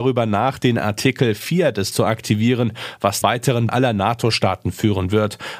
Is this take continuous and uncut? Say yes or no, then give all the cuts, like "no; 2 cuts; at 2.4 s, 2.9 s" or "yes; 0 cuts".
no; 3 cuts; at 1.9 s, 3.2 s, 3.7 s